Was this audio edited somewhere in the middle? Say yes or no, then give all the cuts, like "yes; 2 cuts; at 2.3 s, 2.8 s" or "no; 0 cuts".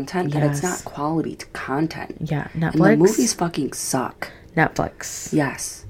no; 0 cuts